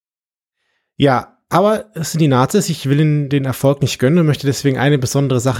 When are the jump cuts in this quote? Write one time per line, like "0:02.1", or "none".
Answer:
none

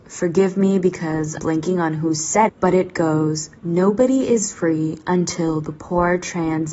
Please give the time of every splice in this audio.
0:01.4
0:02.5
0:03.6

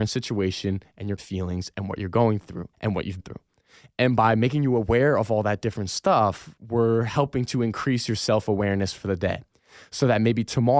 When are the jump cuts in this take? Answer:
0:01.2
0:02.7
0:03.2

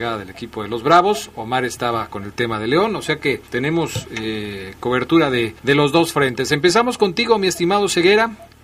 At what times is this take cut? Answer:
0:03.5
0:05.6

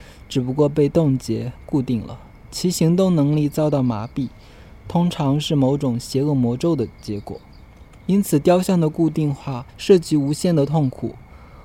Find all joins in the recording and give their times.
0:09.7

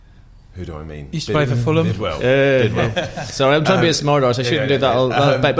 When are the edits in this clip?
none

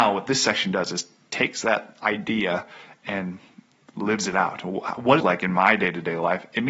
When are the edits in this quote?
0:05.2

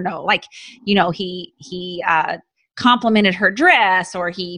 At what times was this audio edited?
none

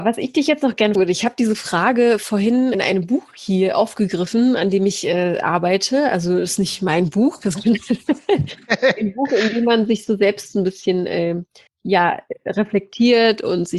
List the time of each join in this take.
0:00.9
0:02.7
0:11.7

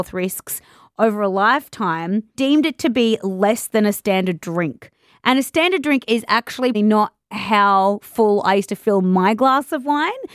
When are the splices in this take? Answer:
0:02.3
0:06.7

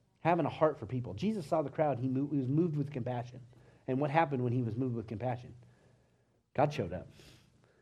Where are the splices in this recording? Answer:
none

